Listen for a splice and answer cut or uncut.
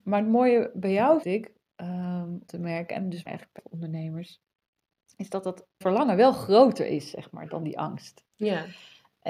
cut